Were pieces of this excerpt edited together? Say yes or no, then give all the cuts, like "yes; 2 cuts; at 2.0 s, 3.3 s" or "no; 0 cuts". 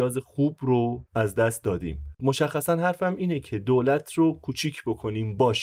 no; 0 cuts